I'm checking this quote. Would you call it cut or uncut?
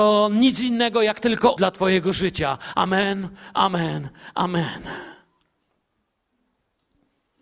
cut